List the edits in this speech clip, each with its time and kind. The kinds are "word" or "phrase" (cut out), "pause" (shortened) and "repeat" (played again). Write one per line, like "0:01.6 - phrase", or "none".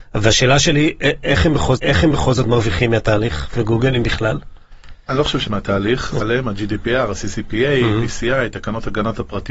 0:01.8 - repeat
0:03.5 - word
0:05.5 - word
0:06.2 - word